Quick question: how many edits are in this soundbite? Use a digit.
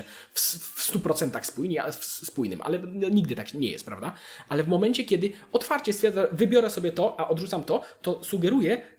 0